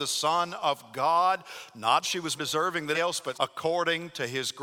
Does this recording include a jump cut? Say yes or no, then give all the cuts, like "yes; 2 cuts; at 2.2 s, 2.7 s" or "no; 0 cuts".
yes; 4 cuts; at 2.0 s, 2.4 s, 2.9 s, 3.3 s